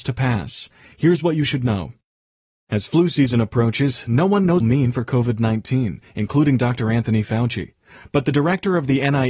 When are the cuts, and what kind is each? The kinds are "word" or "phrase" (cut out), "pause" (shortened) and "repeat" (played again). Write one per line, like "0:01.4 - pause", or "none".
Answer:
0:04.6 - phrase